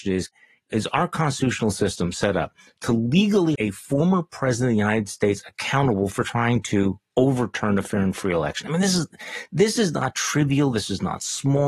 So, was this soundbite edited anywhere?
yes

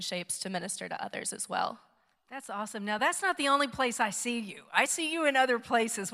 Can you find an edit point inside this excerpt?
no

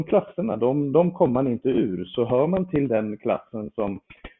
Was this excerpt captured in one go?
yes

